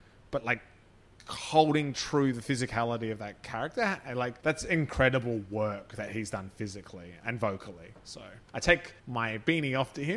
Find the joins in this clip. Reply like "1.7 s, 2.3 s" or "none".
4.4 s, 8.5 s, 9.0 s